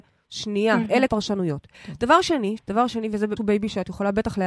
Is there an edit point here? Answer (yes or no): yes